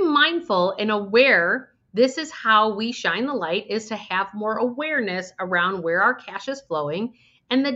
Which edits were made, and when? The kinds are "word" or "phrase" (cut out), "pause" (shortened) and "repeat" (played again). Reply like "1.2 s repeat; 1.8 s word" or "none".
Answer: none